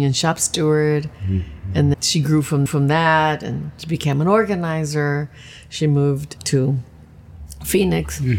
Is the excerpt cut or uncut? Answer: cut